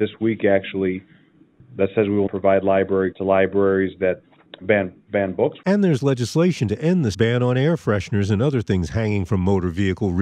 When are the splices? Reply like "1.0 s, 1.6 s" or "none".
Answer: 2.3 s, 3.1 s, 7.1 s